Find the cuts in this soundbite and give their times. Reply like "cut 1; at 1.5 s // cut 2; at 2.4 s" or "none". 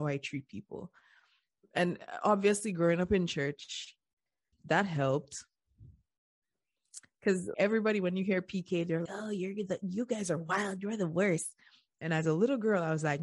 cut 1; at 4.5 s // cut 2; at 7.5 s // cut 3; at 9.1 s